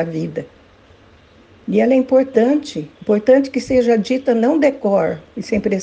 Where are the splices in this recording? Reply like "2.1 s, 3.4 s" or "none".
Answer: 3.0 s